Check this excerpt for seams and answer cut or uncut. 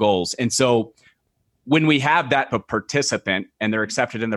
cut